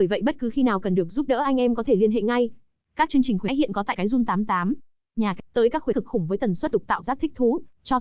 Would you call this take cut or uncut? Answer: cut